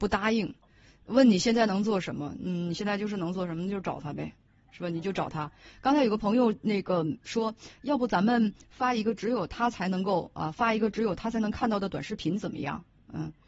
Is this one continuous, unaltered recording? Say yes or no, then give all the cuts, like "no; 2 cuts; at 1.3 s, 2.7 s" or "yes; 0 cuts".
yes; 0 cuts